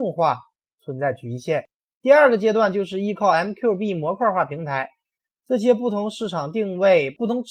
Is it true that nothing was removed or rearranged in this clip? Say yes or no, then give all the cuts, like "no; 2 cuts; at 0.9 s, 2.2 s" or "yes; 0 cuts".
yes; 0 cuts